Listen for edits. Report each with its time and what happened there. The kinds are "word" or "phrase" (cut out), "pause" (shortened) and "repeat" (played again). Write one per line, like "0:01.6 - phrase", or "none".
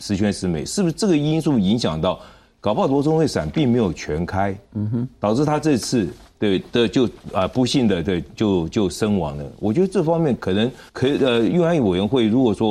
0:10.9 - pause

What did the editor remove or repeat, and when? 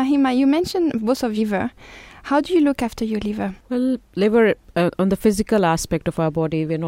0:01.4 - phrase
0:03.6 - pause

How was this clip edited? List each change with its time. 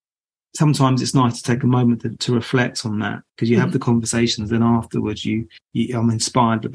0:03.3 - pause
0:05.6 - pause

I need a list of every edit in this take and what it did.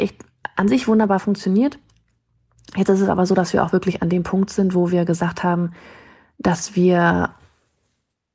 none

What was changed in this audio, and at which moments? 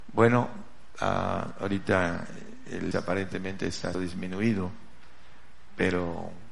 0:02.9 - word
0:03.9 - word

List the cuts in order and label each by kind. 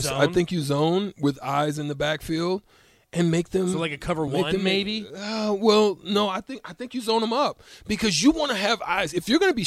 none

